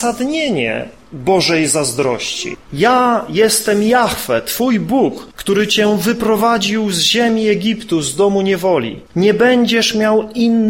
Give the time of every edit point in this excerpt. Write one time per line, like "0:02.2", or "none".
0:05.3
0:09.1